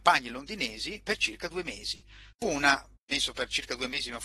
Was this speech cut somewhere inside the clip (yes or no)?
yes